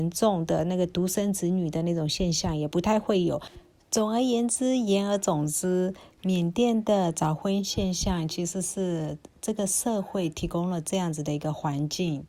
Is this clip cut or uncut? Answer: uncut